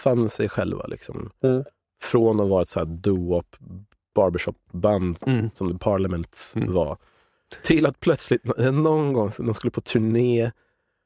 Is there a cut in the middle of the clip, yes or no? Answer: no